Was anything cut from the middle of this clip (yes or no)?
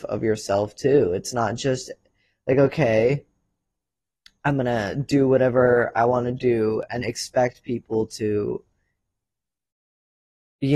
yes